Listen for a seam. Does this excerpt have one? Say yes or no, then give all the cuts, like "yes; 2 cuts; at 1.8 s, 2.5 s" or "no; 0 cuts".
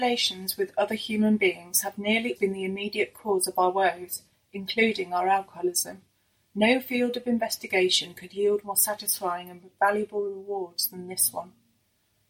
yes; 1 cut; at 2.4 s